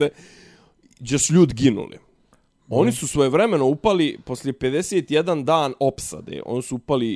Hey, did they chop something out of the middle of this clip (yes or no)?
no